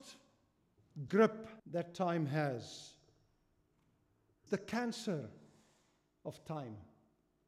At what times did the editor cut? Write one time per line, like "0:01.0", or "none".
0:01.1
0:01.6
0:04.5

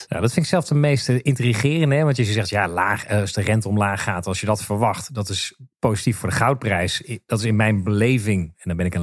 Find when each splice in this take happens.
0:05.7

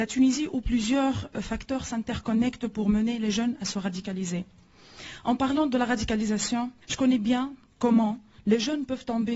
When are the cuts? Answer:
0:06.8

